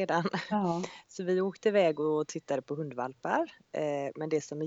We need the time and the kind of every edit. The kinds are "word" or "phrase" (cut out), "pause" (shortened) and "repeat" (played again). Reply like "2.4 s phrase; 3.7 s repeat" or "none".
none